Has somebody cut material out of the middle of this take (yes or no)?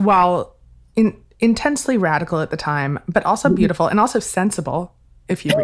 no